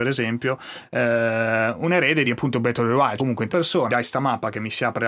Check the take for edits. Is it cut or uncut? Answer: cut